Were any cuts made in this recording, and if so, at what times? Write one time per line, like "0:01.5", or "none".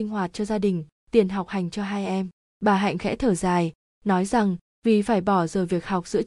none

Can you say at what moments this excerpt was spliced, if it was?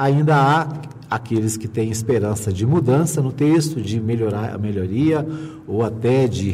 none

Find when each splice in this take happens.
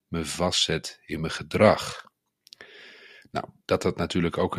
none

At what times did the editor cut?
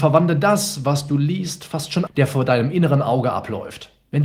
0:02.1

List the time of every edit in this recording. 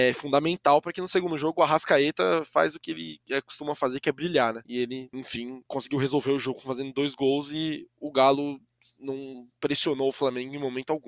none

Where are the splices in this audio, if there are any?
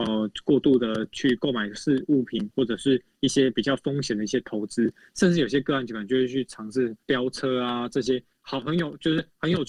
0:07.0

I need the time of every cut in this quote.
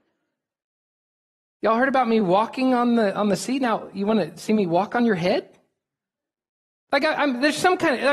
none

